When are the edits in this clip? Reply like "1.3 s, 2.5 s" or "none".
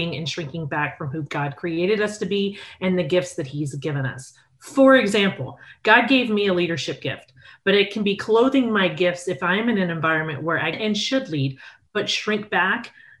10.7 s